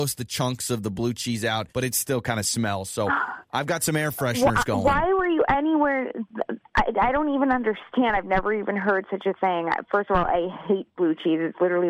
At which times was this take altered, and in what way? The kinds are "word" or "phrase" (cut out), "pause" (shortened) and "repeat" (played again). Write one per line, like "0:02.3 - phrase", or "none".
0:01.7 - pause

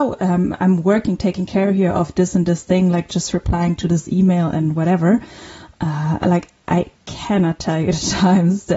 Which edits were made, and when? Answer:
0:07.0 - pause

